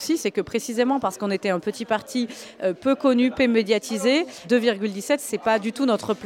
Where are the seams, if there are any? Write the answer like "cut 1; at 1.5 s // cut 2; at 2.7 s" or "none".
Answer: cut 1; at 4.4 s